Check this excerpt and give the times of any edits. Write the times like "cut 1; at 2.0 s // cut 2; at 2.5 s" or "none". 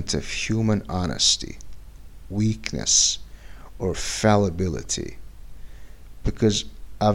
none